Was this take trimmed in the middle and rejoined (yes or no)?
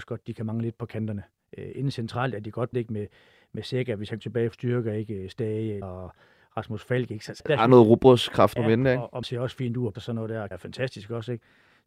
yes